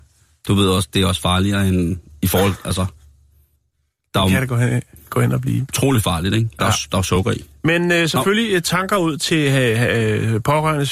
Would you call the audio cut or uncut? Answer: uncut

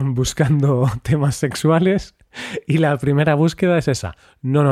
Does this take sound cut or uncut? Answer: uncut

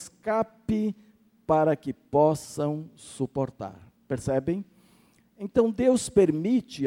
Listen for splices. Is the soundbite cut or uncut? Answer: uncut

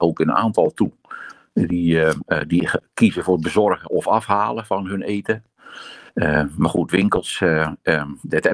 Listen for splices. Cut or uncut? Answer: cut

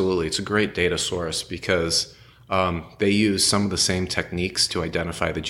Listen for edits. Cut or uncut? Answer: uncut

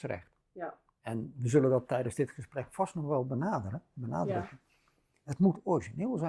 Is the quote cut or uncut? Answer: uncut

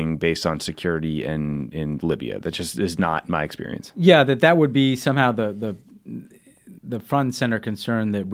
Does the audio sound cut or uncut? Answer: cut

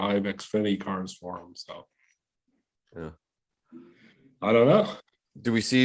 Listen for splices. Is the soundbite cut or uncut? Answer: uncut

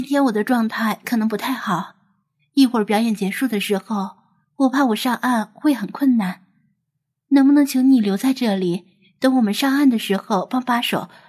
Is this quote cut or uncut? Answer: uncut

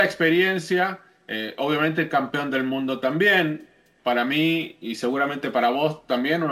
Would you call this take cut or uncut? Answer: uncut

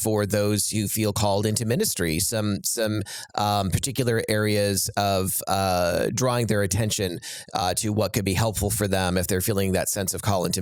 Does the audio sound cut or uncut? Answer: uncut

